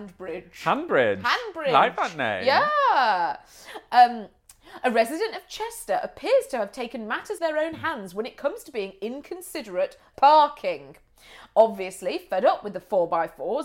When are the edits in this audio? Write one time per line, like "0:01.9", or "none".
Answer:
0:07.4
0:10.1

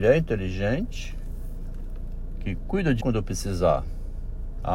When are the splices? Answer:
0:03.0

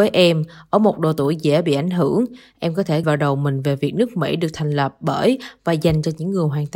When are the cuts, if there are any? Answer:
0:03.0

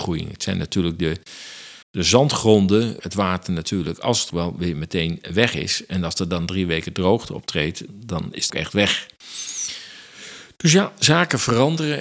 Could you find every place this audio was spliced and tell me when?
0:01.8
0:03.0
0:04.3
0:07.9
0:08.5

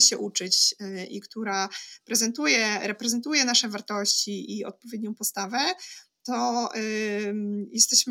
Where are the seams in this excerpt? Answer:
none

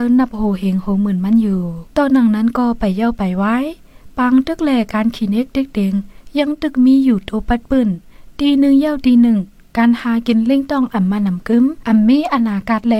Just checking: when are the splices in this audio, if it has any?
none

